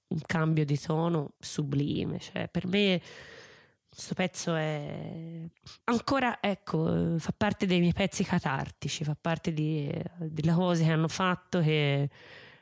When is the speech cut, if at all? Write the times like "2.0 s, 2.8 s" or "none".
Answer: 1.4 s, 5.8 s